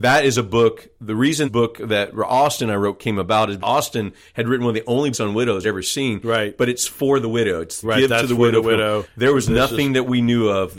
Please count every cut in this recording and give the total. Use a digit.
6